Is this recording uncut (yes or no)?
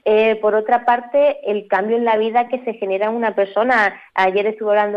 yes